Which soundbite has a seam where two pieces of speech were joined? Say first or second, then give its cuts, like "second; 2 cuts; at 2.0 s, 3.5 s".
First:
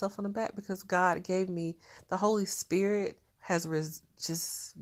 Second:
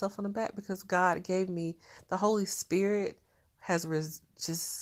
first; 1 cut; at 3.3 s